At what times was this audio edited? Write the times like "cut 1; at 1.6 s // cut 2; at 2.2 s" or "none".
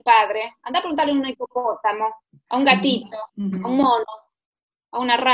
cut 1; at 2.2 s // cut 2; at 3.3 s